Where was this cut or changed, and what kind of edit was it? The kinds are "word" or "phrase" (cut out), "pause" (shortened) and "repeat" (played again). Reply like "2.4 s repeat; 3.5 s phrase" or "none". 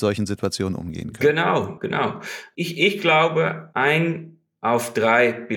1.8 s word